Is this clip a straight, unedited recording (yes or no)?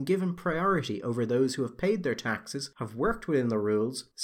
yes